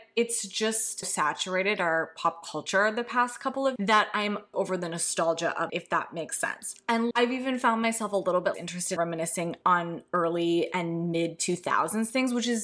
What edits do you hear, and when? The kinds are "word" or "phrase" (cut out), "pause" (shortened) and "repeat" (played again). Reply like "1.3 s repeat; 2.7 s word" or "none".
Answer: 1.0 s word; 3.8 s word; 4.5 s word; 5.7 s word; 7.1 s word; 8.5 s word; 9.0 s word